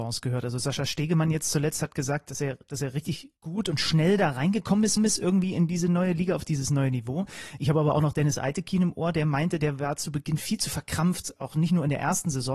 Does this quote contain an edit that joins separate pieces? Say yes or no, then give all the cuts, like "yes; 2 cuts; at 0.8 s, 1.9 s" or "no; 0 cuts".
yes; 2 cuts; at 3.4 s, 5.0 s